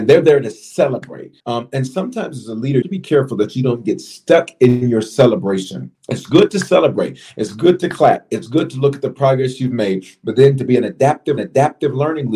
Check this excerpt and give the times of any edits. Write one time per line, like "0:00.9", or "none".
0:01.4
0:02.8
0:06.0
0:11.4